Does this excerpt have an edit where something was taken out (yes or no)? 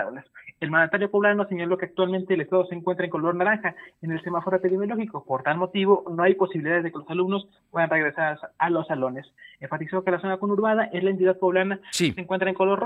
no